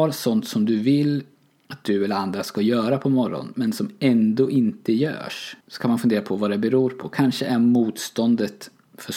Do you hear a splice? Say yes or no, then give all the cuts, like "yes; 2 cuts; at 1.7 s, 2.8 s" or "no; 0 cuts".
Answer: yes; 1 cut; at 5.6 s